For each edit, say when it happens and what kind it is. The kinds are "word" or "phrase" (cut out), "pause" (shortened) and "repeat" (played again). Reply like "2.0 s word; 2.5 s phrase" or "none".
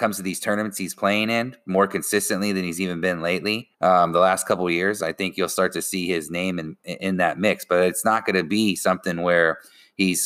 3.7 s pause